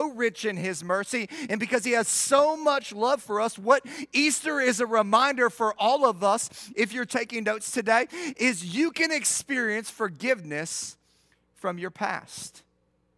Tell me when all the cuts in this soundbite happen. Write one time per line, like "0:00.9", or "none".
none